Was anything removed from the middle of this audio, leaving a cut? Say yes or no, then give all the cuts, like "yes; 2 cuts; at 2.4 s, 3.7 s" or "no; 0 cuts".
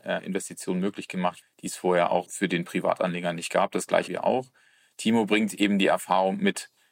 yes; 3 cuts; at 1.4 s, 2.3 s, 4.1 s